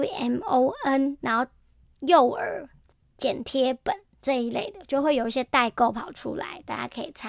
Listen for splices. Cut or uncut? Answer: uncut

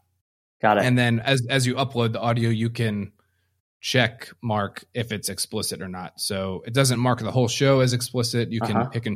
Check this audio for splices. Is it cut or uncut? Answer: uncut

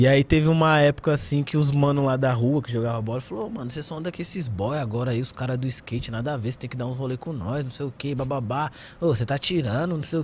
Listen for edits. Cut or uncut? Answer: uncut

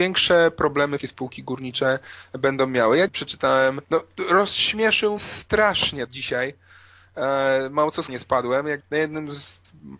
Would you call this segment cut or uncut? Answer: cut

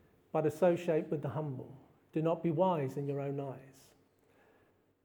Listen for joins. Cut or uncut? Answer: uncut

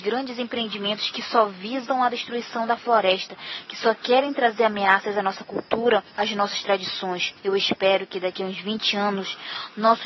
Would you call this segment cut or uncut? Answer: cut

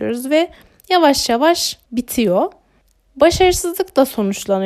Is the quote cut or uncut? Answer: cut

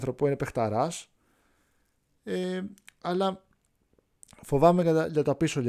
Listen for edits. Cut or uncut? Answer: uncut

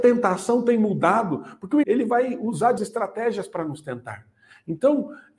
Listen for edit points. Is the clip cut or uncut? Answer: cut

